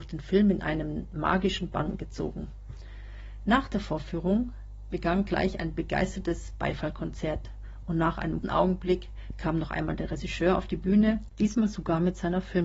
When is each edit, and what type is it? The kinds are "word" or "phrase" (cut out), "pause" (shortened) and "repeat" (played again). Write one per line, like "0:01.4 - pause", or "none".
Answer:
0:08.4 - word